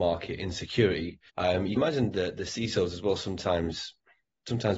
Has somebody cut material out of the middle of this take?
yes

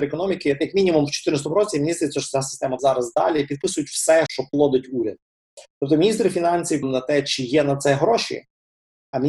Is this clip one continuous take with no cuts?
no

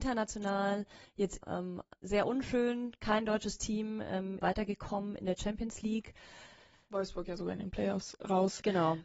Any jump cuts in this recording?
yes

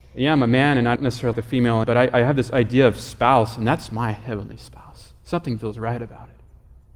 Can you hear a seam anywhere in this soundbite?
yes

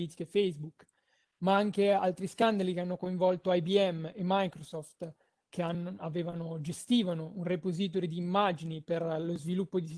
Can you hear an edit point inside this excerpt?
no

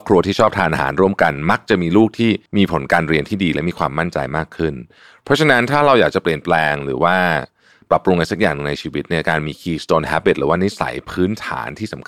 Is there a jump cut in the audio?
yes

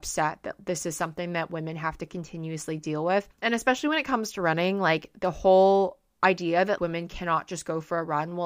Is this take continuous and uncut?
no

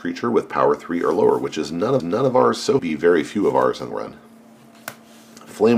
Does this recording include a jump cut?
yes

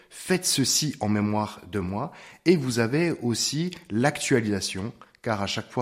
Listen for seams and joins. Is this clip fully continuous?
yes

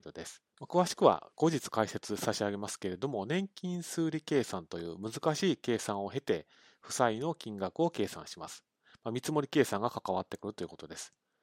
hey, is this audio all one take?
yes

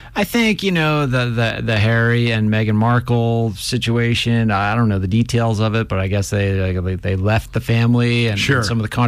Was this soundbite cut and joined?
no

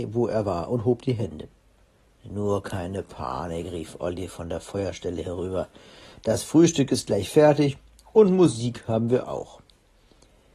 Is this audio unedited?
yes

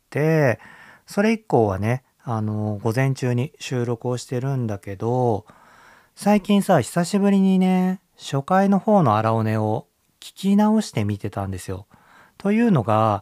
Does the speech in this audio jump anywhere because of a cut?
no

